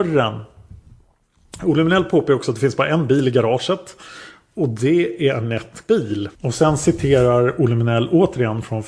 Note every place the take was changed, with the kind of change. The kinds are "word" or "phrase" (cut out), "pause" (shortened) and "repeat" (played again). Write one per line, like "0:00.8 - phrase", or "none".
0:05.9 - word
0:06.3 - pause